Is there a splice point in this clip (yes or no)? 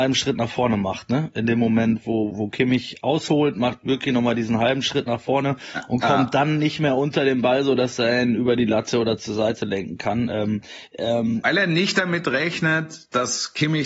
yes